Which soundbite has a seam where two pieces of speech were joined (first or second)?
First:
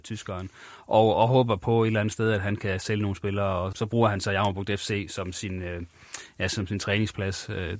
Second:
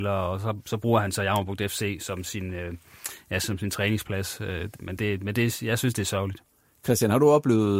first